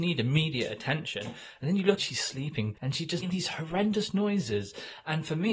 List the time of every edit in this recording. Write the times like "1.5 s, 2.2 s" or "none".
2.0 s, 2.7 s, 3.2 s

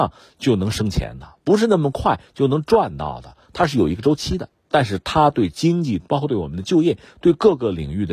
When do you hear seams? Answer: 4.6 s

